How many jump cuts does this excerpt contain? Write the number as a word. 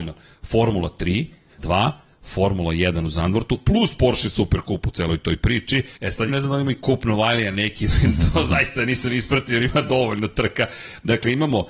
three